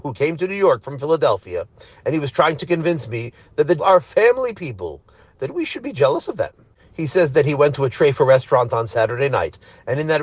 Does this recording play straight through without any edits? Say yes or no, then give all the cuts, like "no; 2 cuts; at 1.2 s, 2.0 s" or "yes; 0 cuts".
no; 1 cut; at 3.8 s